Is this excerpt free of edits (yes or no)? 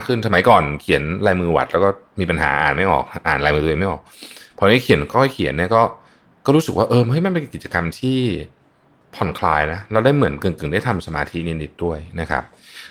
yes